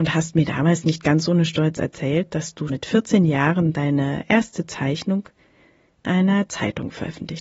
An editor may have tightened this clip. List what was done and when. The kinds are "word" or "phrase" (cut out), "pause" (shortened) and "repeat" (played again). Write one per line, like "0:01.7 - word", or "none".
0:02.7 - word
0:06.0 - word